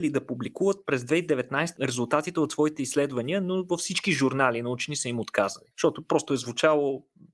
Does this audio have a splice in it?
yes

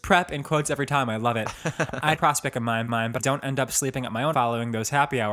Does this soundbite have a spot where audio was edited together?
yes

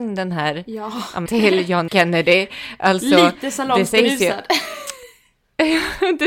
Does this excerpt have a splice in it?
yes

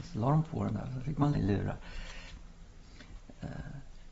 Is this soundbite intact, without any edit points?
no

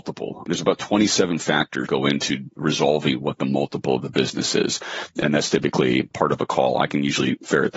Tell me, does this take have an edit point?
yes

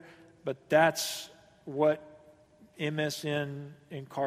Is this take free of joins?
yes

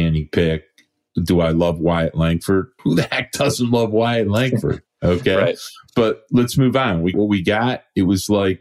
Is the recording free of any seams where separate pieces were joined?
no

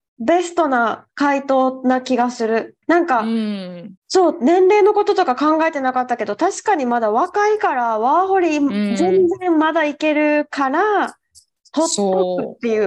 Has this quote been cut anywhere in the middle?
yes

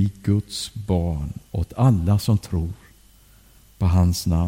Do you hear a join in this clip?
yes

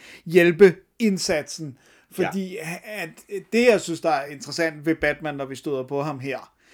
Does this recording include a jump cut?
no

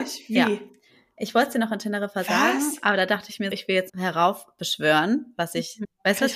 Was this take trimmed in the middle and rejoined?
yes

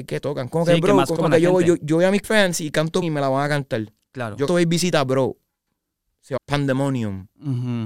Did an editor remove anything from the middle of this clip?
yes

